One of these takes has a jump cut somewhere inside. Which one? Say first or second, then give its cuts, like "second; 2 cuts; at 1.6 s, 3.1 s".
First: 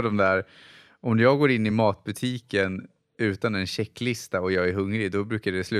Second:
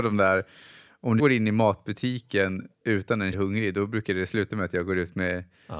second; 3 cuts; at 1.2 s, 2.7 s, 3.3 s